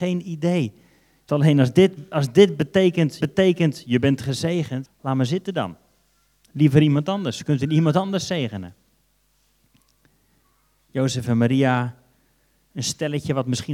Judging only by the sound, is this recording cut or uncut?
cut